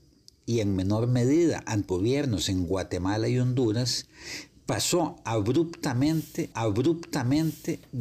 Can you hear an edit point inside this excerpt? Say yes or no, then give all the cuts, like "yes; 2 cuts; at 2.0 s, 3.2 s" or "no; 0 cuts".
yes; 2 cuts; at 1.9 s, 6.5 s